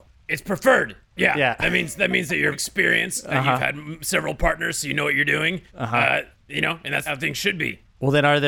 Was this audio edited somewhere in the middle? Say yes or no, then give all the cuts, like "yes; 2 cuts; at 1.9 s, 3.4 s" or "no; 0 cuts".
yes; 2 cuts; at 2.5 s, 5.7 s